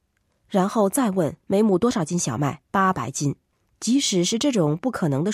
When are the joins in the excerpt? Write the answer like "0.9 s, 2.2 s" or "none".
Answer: 1.4 s, 2.7 s, 3.5 s